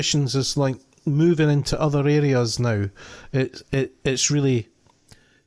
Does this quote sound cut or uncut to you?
uncut